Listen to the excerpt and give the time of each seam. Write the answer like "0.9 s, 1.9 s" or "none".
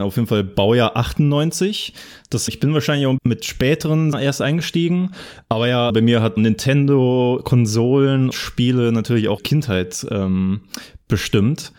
2.5 s, 3.2 s, 4.1 s, 5.9 s, 6.4 s, 8.3 s, 9.4 s